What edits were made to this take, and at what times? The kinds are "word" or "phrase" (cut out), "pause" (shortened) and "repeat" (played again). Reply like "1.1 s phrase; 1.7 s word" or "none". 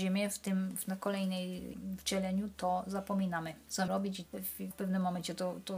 1.7 s word; 3.9 s word; 4.3 s word; 4.7 s word